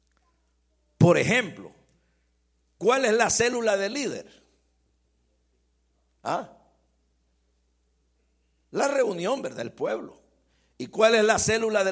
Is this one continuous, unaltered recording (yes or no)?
yes